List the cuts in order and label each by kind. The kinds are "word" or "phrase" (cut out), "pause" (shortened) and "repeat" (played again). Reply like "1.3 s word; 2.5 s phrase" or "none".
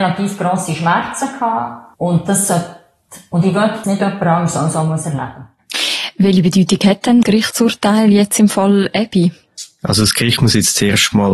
1.9 s pause; 3.8 s phrase; 7.2 s word